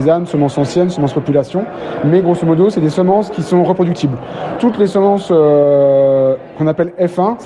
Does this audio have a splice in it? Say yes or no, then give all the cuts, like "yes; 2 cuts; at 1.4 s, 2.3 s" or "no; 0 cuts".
no; 0 cuts